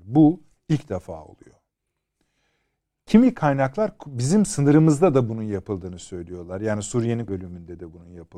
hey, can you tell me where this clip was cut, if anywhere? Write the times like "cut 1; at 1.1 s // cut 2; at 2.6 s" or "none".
cut 1; at 7.3 s